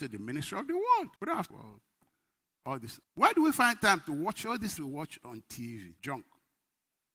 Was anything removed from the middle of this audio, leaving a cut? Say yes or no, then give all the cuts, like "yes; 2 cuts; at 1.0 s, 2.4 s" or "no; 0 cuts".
yes; 5 cuts; at 1.2 s, 1.5 s, 3.0 s, 4.8 s, 6.0 s